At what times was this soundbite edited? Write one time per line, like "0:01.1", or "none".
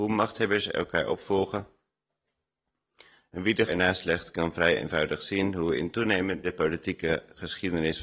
0:03.7
0:06.4